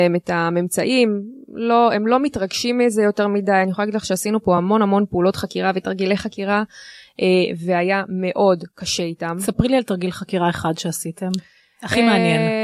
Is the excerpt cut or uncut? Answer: uncut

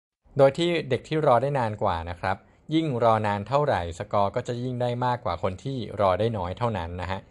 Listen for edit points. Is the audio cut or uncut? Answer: uncut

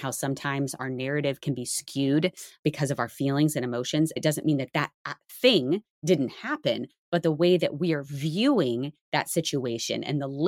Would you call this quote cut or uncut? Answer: uncut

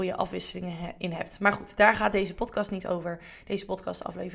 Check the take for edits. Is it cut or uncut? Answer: uncut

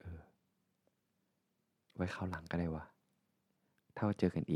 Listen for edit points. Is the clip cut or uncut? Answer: uncut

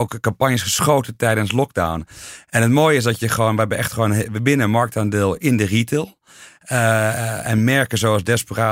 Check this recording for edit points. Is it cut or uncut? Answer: uncut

